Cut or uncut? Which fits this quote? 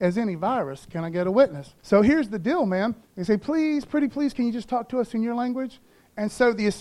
cut